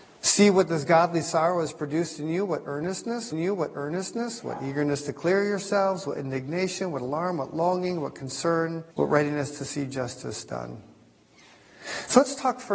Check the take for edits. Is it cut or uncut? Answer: cut